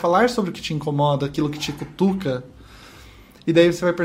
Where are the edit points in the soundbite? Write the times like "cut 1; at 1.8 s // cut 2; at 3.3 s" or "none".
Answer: none